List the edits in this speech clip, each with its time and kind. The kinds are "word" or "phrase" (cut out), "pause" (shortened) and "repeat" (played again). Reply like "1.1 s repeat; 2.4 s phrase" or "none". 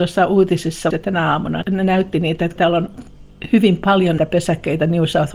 0.9 s phrase; 1.6 s word; 2.6 s word; 4.2 s word